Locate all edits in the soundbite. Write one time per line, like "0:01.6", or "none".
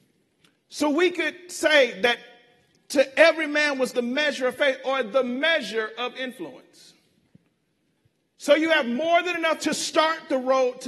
0:03.9
0:09.6